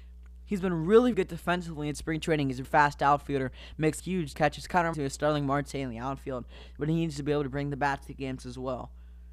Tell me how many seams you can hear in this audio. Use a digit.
5